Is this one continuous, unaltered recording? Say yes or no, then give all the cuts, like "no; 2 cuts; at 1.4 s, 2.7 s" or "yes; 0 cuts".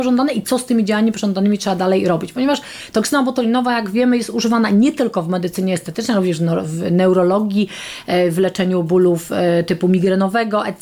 yes; 0 cuts